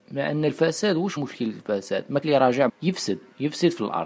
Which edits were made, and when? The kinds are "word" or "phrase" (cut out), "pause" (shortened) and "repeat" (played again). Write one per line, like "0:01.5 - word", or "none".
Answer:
0:01.2 - word
0:02.2 - word
0:02.7 - word